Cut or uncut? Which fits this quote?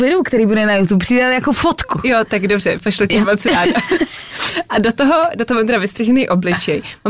uncut